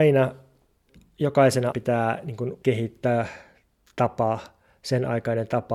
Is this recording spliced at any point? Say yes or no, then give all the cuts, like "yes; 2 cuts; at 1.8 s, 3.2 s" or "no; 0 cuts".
yes; 2 cuts; at 1.7 s, 2.6 s